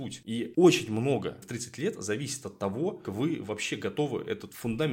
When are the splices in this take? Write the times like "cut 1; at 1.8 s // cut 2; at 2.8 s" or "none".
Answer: cut 1; at 1.4 s // cut 2; at 3.0 s